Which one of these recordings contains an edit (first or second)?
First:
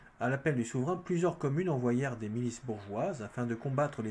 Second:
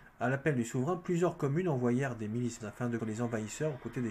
second